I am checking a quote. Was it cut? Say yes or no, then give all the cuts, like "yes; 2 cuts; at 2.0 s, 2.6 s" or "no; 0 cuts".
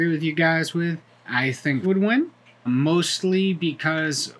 yes; 3 cuts; at 1.1 s, 1.8 s, 2.7 s